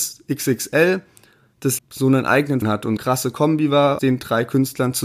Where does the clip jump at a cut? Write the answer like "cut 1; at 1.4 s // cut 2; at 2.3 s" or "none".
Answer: cut 1; at 1.8 s // cut 2; at 2.6 s // cut 3; at 3.0 s // cut 4; at 4.0 s